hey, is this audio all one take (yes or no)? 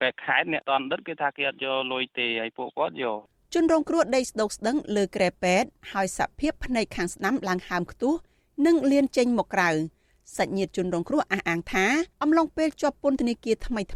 no